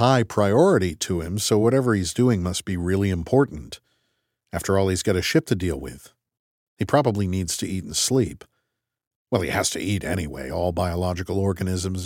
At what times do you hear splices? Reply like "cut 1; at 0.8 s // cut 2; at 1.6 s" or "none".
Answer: none